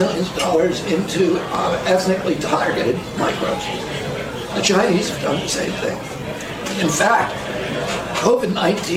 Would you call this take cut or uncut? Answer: uncut